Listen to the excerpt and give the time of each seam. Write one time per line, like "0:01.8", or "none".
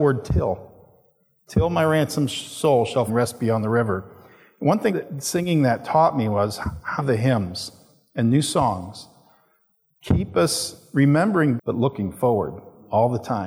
0:03.1
0:04.9
0:07.0
0:11.6